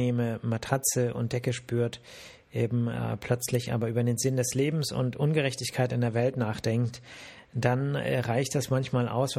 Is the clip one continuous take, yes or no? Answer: yes